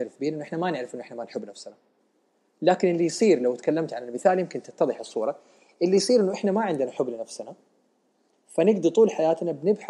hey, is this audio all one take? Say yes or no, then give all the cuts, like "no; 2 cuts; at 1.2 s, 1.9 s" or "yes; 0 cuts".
yes; 0 cuts